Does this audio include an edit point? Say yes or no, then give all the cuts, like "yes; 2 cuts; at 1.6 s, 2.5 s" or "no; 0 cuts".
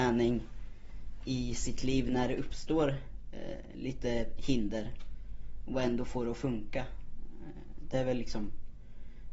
no; 0 cuts